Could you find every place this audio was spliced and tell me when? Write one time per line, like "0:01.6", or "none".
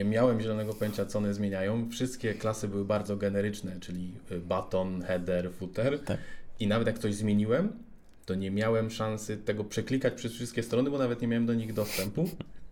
none